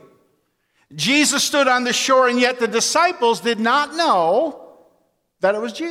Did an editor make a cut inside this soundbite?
no; 0 cuts

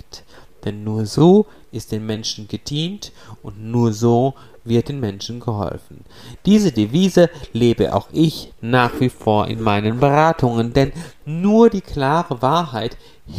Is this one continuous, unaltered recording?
yes; 0 cuts

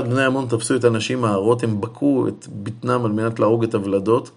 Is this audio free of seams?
yes; 0 cuts

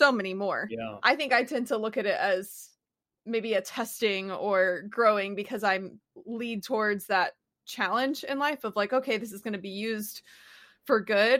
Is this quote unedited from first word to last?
yes; 0 cuts

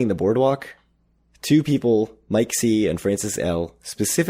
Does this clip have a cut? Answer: no; 0 cuts

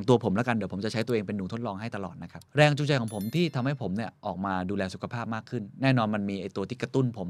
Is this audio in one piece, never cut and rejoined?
no; 1 cut; at 2.5 s

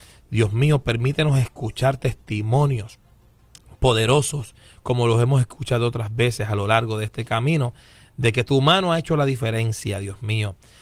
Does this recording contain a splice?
no; 0 cuts

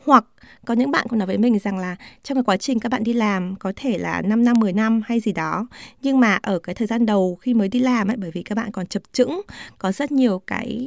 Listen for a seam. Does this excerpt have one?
no; 0 cuts

